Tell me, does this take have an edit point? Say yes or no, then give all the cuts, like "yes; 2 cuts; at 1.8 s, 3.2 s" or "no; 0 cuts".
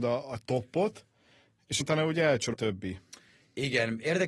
yes; 2 cuts; at 1.8 s, 2.5 s